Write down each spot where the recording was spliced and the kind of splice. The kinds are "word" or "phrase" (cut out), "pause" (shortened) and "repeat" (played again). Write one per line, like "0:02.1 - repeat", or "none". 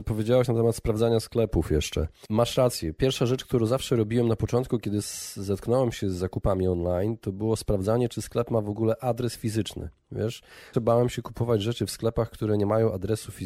0:10.7 - word

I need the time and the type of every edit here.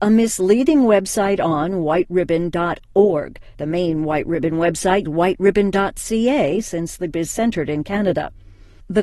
0:03.5 - pause
0:05.1 - word
0:07.1 - word

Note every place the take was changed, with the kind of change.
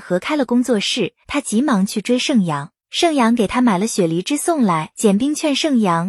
0:01.2 - pause
0:02.8 - pause
0:04.9 - pause

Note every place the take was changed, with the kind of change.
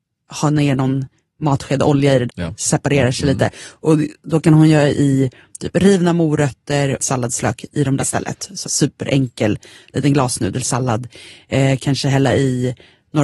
0:02.3 - phrase
0:07.0 - phrase
0:08.0 - word
0:08.6 - phrase

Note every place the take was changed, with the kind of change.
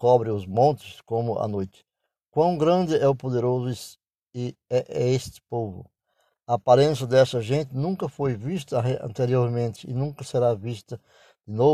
none

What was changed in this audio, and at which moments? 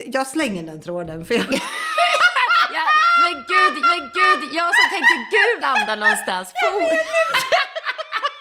0:03.8 - repeat
0:05.6 - phrase

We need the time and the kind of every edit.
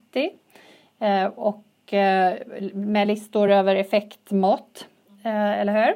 none

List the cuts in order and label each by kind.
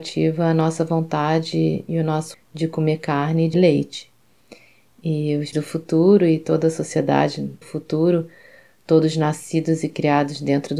0:02.3 - word
0:03.5 - word
0:05.5 - word
0:07.6 - word

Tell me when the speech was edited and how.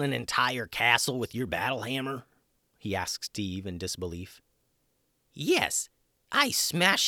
none

